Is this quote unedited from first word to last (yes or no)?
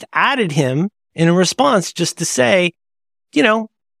yes